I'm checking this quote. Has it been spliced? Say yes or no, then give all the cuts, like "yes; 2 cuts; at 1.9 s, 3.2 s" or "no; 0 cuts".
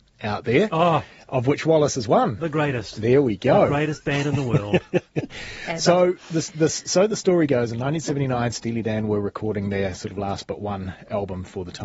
no; 0 cuts